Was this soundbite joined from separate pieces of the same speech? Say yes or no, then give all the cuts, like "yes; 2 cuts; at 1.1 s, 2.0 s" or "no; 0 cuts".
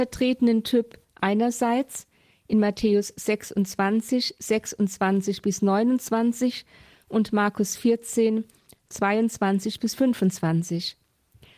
no; 0 cuts